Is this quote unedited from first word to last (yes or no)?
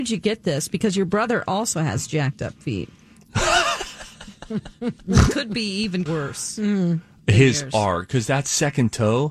no